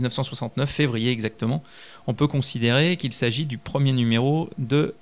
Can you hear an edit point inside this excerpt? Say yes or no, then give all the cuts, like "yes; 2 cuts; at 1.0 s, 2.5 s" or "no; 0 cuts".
no; 0 cuts